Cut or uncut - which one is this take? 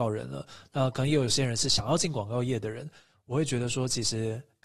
uncut